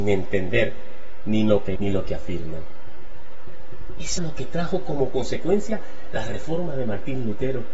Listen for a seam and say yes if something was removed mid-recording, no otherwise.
yes